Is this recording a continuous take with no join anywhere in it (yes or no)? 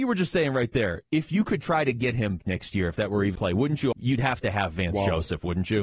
no